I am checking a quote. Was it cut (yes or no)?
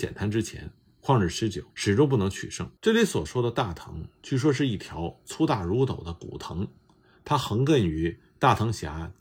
yes